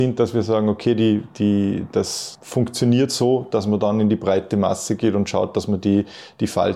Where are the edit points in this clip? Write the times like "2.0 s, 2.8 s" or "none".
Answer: none